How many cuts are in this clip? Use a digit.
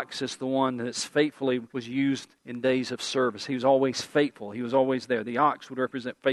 2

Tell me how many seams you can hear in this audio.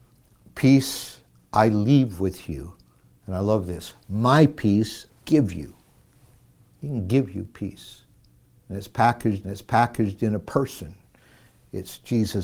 2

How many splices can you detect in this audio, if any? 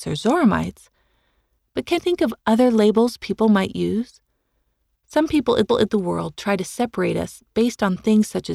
2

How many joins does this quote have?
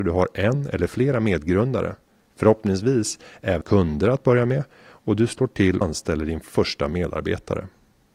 2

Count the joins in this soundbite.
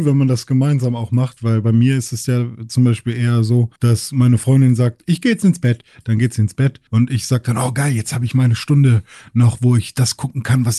2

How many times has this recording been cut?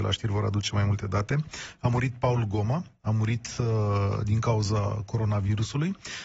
0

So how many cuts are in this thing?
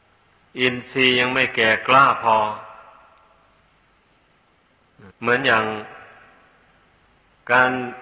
1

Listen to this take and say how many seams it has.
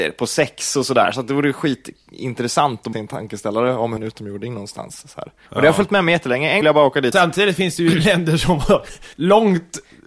6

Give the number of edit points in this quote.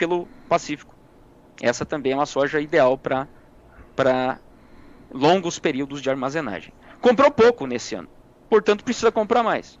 0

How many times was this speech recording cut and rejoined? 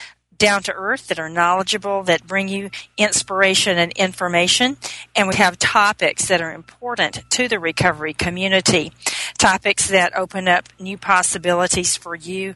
1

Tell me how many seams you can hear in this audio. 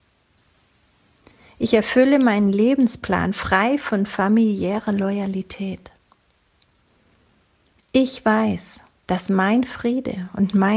0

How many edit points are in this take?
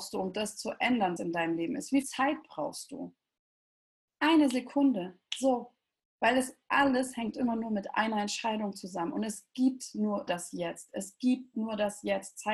3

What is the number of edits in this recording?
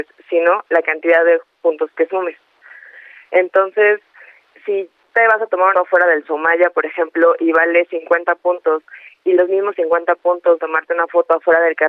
3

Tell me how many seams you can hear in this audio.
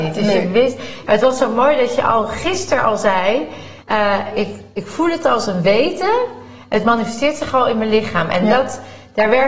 1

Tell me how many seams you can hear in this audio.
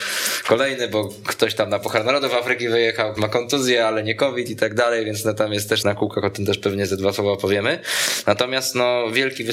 2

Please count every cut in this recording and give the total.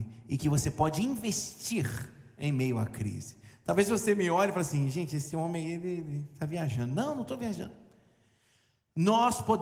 0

